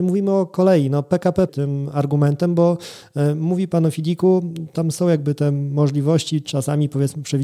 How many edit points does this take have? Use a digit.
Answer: 1